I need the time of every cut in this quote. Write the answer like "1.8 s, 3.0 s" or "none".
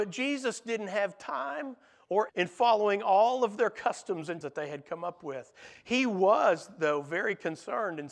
2.3 s, 4.4 s